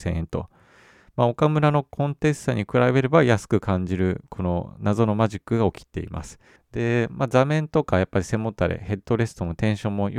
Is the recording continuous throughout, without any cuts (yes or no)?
no